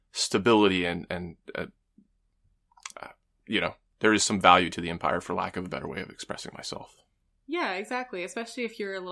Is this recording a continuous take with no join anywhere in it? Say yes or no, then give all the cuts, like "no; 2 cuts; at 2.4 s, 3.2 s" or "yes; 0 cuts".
yes; 0 cuts